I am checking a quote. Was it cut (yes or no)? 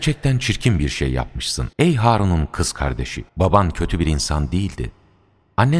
yes